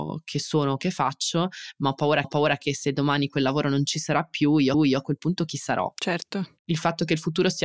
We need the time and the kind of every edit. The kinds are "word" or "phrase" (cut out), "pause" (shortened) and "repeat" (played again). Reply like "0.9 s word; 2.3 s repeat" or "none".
2.2 s repeat; 4.7 s repeat